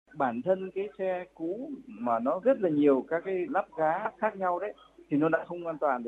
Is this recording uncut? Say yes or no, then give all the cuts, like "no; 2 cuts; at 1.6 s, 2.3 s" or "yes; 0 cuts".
no; 2 cuts; at 2.4 s, 3.5 s